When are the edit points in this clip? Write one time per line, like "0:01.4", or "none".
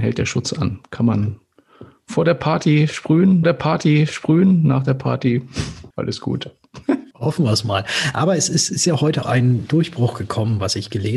0:03.4
0:05.9
0:07.1
0:09.2